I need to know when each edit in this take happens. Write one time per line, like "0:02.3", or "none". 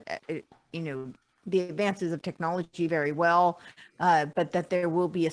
none